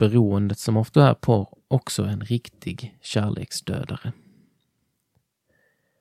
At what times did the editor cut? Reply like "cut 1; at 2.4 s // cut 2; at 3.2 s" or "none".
cut 1; at 0.9 s